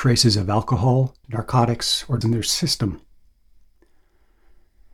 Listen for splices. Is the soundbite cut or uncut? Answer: cut